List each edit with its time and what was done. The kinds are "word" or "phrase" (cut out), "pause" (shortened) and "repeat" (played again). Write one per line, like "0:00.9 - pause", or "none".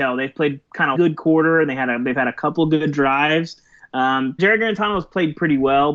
0:00.9 - word
0:04.4 - word

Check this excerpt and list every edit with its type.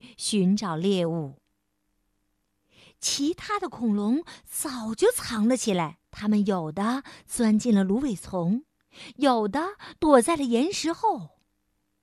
0:06.0 - pause

